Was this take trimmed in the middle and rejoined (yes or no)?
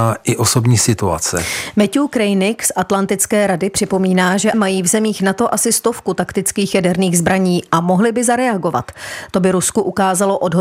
yes